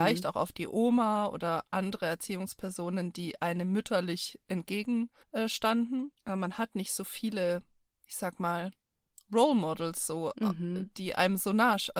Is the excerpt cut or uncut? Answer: uncut